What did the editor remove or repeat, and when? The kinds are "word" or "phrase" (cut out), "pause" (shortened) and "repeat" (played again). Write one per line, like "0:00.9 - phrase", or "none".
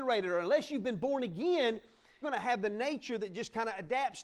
0:02.2 - word